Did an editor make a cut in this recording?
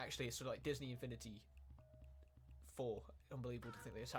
no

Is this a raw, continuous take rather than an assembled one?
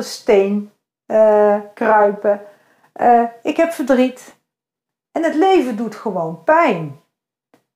yes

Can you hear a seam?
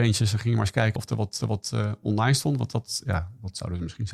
yes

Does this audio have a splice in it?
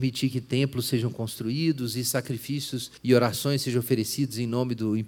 yes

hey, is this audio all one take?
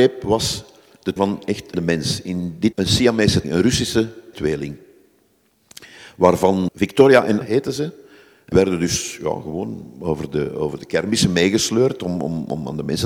no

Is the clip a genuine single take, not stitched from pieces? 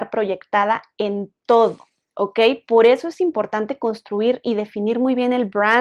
yes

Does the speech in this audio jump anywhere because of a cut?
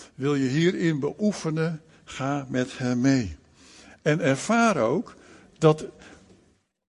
no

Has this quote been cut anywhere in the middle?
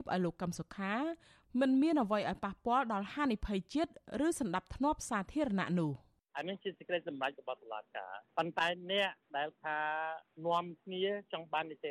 no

